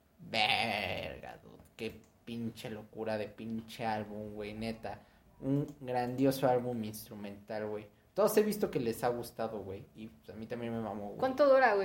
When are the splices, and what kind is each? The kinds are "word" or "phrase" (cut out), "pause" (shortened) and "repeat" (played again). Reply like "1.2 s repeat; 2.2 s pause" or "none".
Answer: none